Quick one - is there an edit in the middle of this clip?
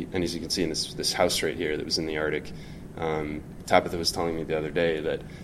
no; 0 cuts

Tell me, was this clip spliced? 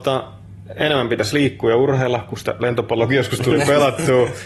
no; 0 cuts

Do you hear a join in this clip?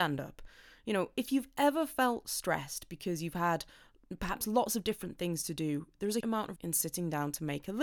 yes; 2 cuts; at 6.2 s, 6.6 s

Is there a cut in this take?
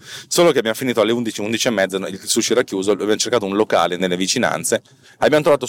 yes; 1 cut; at 4.0 s

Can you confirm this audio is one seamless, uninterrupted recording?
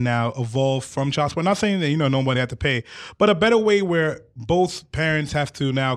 yes; 0 cuts

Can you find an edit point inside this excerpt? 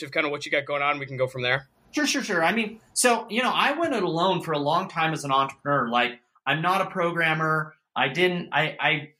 no; 0 cuts

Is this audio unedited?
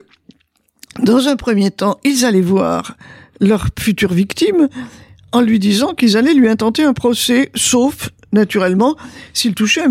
yes; 0 cuts

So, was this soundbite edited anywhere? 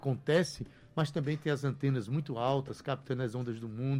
no; 0 cuts

